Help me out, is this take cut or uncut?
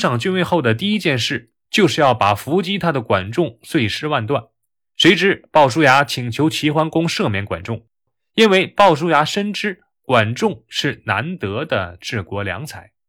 uncut